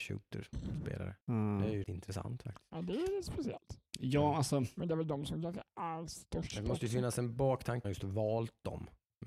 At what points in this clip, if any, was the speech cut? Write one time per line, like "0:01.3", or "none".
0:01.2
0:01.8
0:07.8